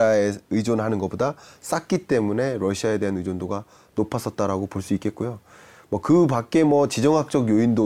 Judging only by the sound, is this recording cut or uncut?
uncut